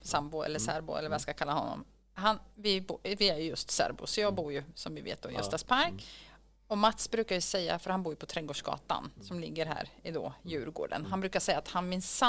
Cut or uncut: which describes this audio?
uncut